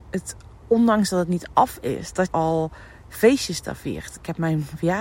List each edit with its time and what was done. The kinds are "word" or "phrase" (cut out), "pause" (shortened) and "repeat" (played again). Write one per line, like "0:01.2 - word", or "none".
0:02.3 - word